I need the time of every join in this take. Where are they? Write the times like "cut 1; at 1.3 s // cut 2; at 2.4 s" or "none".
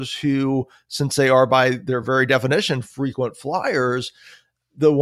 none

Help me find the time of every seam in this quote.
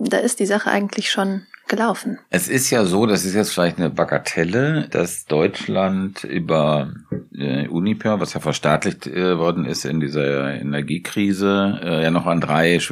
none

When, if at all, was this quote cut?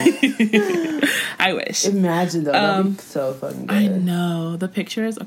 none

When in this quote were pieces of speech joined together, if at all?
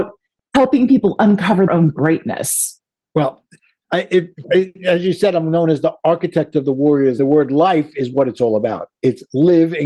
cut 1; at 1.7 s // cut 2; at 4.4 s // cut 3; at 7.2 s

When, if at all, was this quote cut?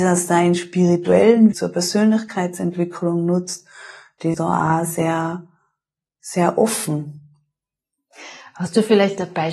cut 1; at 1.5 s // cut 2; at 4.3 s

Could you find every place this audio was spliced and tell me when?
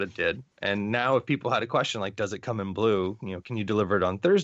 none

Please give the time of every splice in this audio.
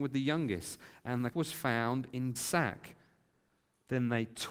cut 1; at 1.3 s // cut 2; at 2.4 s

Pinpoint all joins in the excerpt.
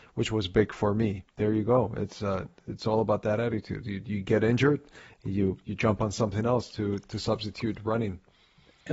cut 1; at 1.3 s

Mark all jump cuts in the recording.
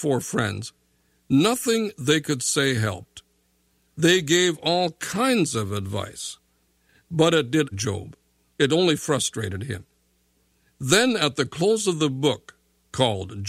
cut 1; at 7.7 s

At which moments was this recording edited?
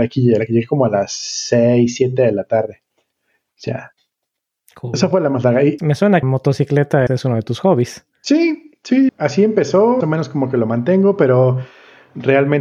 cut 1; at 2.9 s // cut 2; at 5.8 s // cut 3; at 6.2 s // cut 4; at 7.1 s // cut 5; at 9.1 s // cut 6; at 10.0 s

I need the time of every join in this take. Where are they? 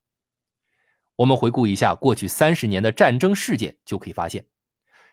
none

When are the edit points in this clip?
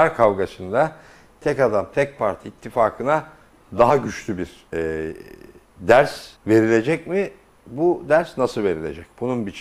cut 1; at 4.7 s // cut 2; at 6.4 s

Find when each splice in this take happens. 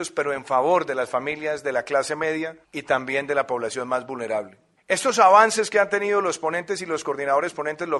cut 1; at 2.6 s // cut 2; at 4.8 s

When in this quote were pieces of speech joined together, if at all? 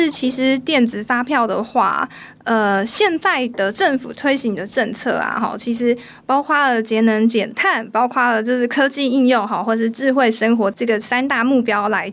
none

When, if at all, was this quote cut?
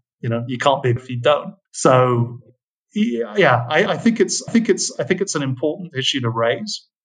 cut 1; at 1.0 s // cut 2; at 1.7 s // cut 3; at 3.9 s // cut 4; at 4.5 s

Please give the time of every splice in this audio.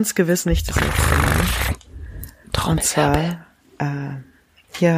none

